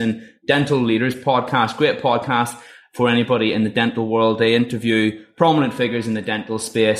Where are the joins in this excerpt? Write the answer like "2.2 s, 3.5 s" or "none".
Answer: none